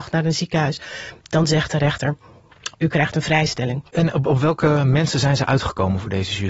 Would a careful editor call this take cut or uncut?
cut